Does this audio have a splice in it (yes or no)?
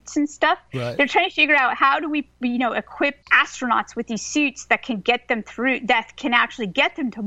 yes